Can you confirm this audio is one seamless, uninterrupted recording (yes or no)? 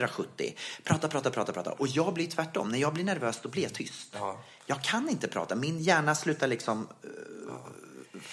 yes